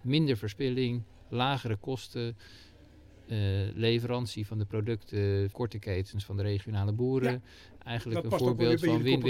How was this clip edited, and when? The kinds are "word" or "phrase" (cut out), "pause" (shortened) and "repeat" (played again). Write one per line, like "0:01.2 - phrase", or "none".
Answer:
0:05.5 - word